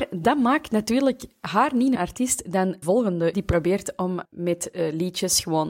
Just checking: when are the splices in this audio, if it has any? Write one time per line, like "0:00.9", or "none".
0:01.9
0:02.8
0:03.3
0:04.2